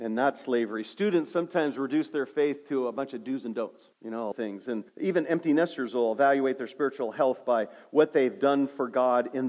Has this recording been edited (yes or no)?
yes